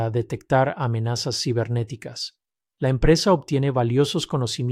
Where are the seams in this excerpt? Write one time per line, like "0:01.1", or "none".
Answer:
none